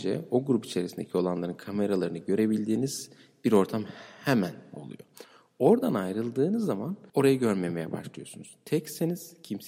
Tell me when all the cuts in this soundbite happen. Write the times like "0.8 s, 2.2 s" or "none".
7.1 s